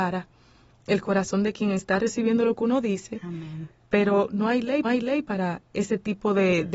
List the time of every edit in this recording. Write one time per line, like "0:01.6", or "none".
0:04.8